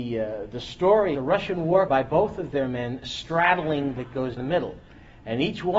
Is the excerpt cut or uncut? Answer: cut